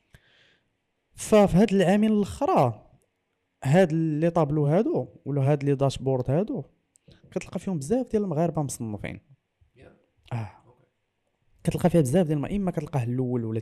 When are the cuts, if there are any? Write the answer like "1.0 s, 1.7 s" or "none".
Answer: none